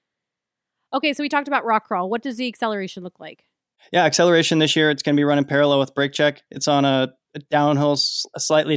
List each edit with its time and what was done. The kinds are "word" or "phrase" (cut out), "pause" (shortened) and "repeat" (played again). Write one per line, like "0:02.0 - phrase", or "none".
none